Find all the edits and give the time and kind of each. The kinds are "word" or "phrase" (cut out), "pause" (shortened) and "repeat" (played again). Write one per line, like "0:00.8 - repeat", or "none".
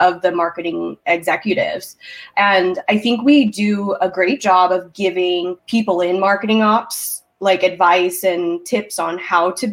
0:05.6 - pause